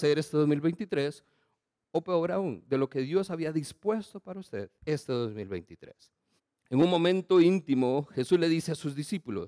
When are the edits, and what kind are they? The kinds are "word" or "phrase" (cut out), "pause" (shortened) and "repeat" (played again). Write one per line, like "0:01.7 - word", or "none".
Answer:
0:04.8 - pause
0:06.4 - pause